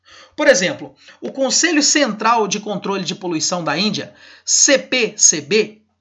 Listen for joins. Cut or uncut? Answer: uncut